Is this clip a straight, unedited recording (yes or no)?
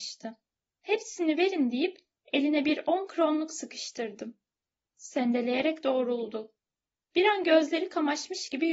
yes